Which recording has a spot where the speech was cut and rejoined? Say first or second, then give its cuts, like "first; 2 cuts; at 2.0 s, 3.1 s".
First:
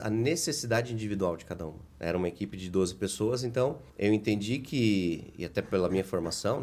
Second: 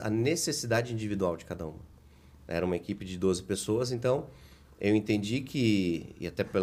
first; 2 cuts; at 1.9 s, 3.9 s